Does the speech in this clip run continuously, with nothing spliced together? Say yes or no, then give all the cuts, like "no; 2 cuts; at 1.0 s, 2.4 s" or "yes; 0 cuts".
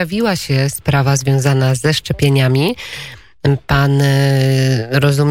yes; 0 cuts